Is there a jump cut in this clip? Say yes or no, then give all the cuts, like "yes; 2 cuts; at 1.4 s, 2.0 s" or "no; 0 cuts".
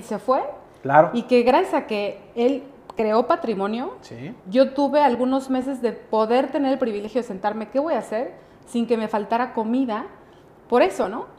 yes; 1 cut; at 4.4 s